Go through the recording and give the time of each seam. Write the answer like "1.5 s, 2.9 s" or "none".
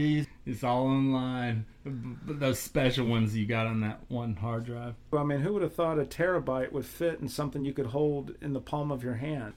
none

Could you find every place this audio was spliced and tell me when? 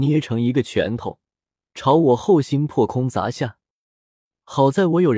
none

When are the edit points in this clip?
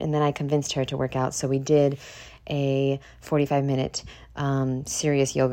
none

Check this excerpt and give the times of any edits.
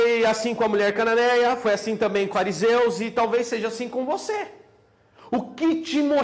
2.3 s

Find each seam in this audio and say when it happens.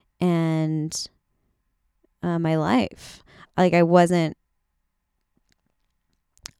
none

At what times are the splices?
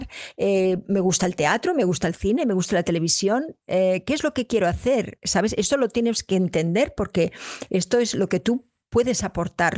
none

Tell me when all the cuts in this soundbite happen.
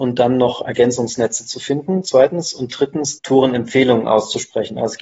3.2 s

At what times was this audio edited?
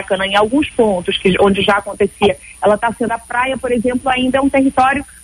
3.1 s

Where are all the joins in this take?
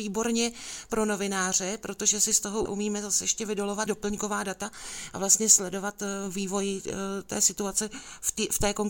2.7 s, 3.9 s

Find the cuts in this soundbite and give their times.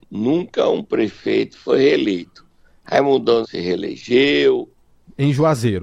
3.4 s

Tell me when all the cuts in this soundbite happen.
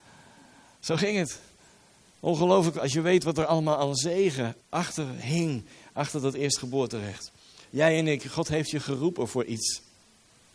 4.6 s

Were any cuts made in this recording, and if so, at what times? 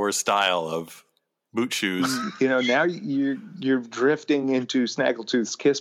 none

